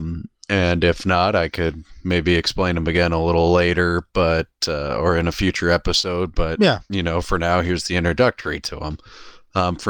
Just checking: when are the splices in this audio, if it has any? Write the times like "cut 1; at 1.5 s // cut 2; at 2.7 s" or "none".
none